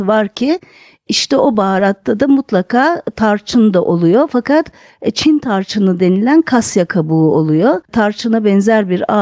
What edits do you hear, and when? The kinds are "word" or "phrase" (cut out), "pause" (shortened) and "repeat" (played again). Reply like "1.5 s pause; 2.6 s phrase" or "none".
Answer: 7.8 s pause